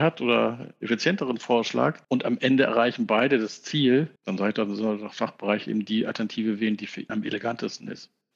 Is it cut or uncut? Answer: cut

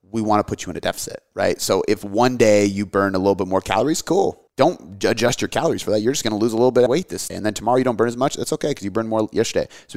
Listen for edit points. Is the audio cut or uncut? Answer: cut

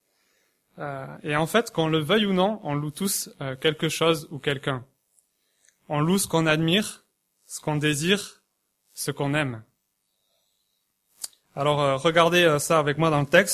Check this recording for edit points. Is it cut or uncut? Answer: uncut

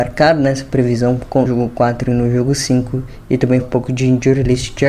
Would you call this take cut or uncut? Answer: cut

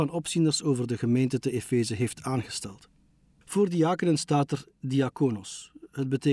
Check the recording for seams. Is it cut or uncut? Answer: uncut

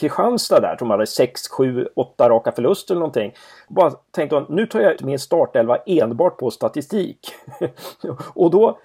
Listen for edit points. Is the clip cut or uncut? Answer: cut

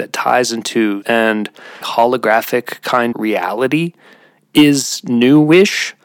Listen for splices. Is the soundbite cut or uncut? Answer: cut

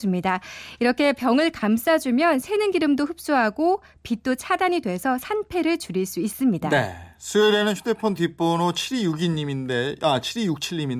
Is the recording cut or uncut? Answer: uncut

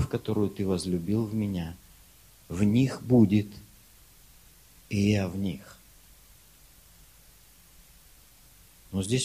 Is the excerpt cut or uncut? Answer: uncut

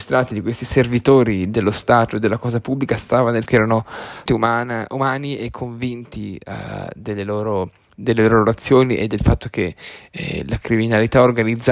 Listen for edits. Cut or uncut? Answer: cut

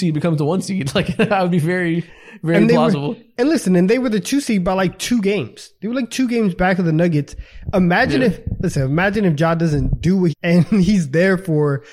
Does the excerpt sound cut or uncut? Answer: cut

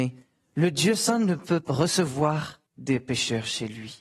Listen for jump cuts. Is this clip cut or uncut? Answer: cut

